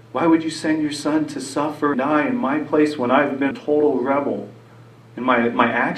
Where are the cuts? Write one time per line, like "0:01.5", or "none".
0:01.9
0:03.5

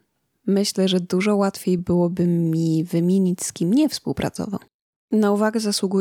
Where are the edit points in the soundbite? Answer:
none

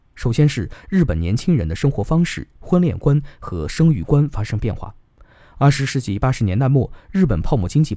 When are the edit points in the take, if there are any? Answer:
none

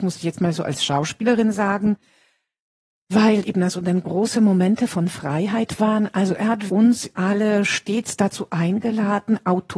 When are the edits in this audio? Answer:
0:03.4
0:06.7

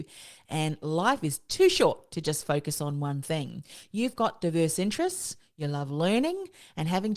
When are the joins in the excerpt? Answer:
none

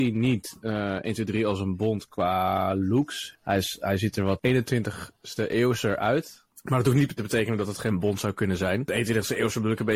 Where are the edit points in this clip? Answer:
0:07.2

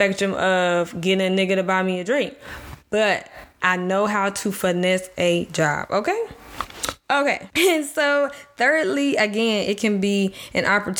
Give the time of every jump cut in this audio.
none

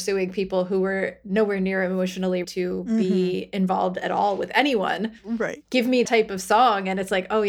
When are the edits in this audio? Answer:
0:02.4
0:05.2
0:06.1

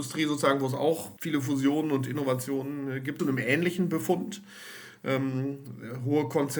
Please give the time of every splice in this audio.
0:01.2
0:03.2

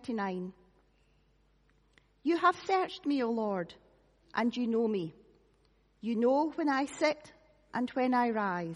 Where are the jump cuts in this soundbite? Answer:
none

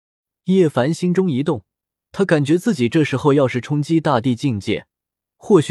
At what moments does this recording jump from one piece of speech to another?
none

